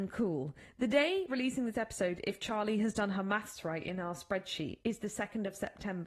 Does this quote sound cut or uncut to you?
cut